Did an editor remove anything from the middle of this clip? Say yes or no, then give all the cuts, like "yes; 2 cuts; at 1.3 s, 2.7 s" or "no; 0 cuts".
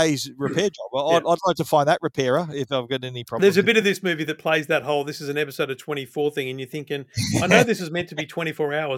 no; 0 cuts